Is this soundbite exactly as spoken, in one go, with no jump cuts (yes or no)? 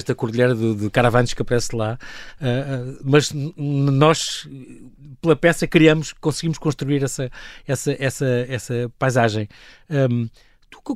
yes